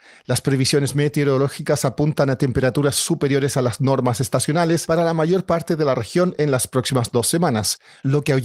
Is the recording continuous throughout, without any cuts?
yes; 0 cuts

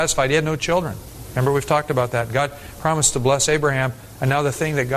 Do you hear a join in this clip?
no; 0 cuts

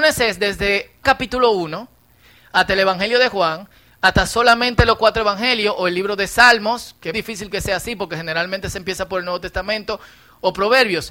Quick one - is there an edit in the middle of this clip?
yes; 2 cuts; at 1.0 s, 7.1 s

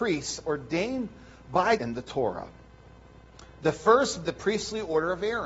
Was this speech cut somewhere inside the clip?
yes; 2 cuts; at 1.8 s, 4.2 s

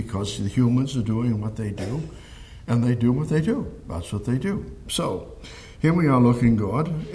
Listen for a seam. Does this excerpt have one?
no; 0 cuts

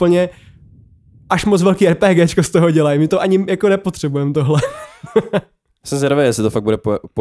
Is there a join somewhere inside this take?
no; 0 cuts

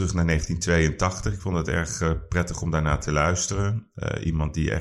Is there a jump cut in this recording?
no; 0 cuts

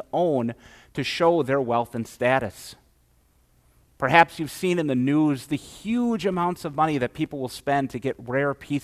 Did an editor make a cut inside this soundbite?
no; 0 cuts

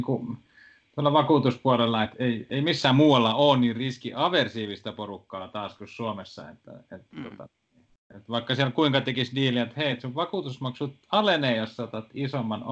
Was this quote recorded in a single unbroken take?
yes; 0 cuts

